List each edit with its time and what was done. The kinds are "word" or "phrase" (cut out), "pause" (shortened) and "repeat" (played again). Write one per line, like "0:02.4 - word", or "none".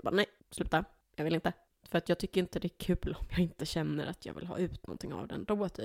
none

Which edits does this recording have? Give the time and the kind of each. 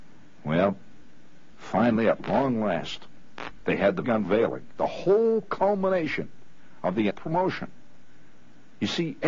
0:04.0 - word
0:05.4 - phrase
0:07.1 - word

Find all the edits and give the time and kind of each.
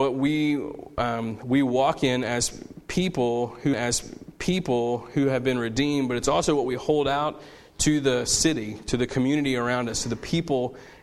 0:03.7 - repeat

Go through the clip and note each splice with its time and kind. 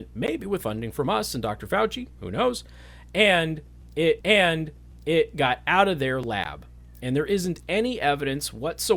0:04.2 - repeat

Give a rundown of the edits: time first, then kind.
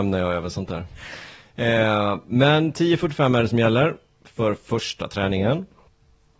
none

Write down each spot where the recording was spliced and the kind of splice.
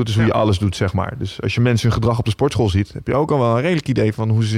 none

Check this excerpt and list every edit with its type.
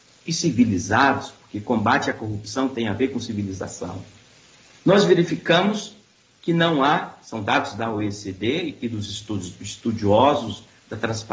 none

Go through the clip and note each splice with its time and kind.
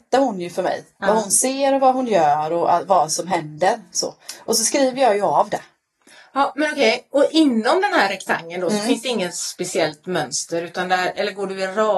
none

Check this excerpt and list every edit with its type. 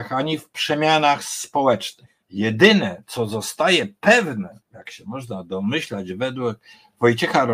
0:02.2 - pause
0:04.6 - pause

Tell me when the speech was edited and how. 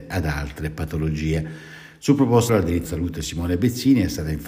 0:02.5 - word
0:02.8 - word

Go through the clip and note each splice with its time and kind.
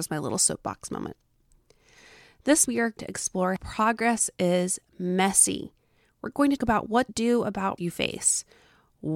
0:02.7 - word
0:03.0 - word
0:03.6 - word
0:06.6 - word
0:07.1 - word
0:07.8 - word

